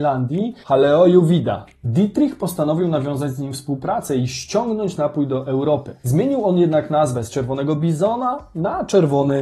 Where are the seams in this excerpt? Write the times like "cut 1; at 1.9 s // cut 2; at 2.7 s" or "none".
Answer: cut 1; at 6.0 s

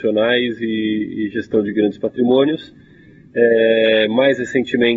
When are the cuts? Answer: none

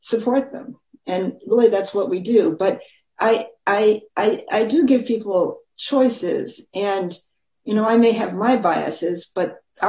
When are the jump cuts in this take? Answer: cut 1; at 4.1 s

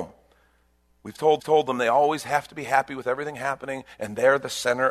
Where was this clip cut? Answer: cut 1; at 1.4 s

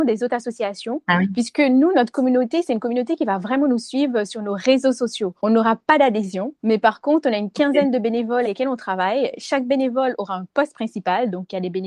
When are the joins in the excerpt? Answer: cut 1; at 5.4 s // cut 2; at 6.6 s // cut 3; at 8.4 s

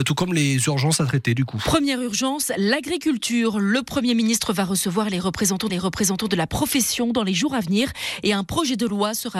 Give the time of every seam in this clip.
cut 1; at 5.7 s

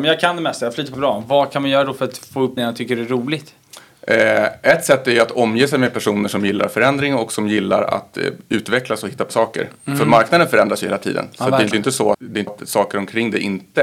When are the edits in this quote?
cut 1; at 0.9 s // cut 2; at 2.6 s // cut 3; at 9.3 s // cut 4; at 11.7 s // cut 5; at 12.1 s // cut 6; at 12.5 s

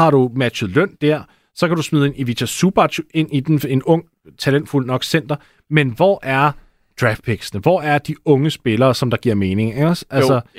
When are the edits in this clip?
none

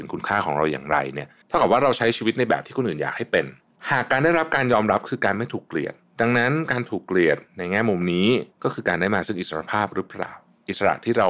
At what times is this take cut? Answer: cut 1; at 1.4 s // cut 2; at 3.6 s // cut 3; at 7.5 s // cut 4; at 8.5 s

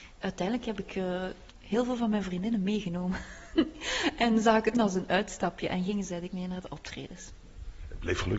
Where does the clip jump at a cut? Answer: cut 1; at 1.5 s // cut 2; at 4.7 s // cut 3; at 6.3 s

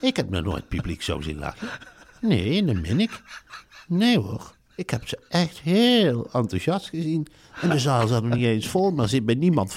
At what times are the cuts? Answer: none

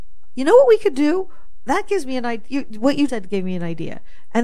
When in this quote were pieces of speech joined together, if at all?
cut 1; at 3.1 s

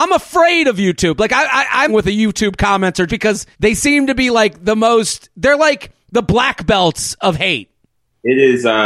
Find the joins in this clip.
cut 1; at 1.9 s // cut 2; at 3.1 s // cut 3; at 3.5 s

